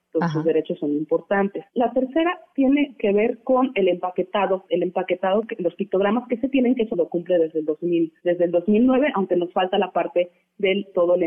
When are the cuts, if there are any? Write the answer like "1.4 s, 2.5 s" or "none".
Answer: 1.7 s, 4.7 s, 6.9 s, 8.2 s